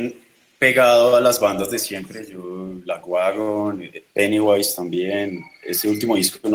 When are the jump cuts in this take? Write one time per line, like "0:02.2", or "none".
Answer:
none